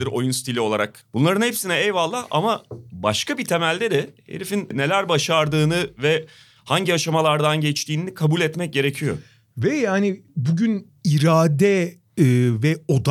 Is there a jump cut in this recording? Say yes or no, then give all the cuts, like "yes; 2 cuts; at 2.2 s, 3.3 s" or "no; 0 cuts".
no; 0 cuts